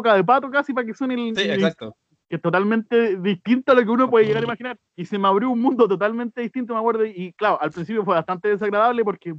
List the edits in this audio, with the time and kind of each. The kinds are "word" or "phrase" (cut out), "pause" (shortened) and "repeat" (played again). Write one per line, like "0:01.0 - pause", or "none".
0:02.2 - pause
0:04.9 - pause